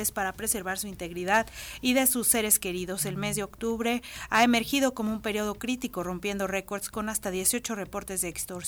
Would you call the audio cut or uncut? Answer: uncut